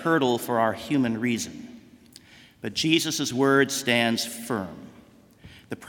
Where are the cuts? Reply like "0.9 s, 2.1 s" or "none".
none